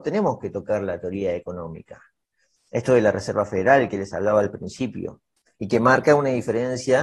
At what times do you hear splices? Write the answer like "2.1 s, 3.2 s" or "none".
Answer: none